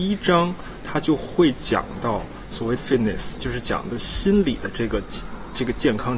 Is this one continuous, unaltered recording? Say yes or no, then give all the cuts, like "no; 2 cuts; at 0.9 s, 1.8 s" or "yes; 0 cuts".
no; 1 cut; at 2.8 s